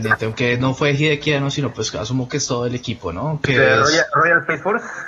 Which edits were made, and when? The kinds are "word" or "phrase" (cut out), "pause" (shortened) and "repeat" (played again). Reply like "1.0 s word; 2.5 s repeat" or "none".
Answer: none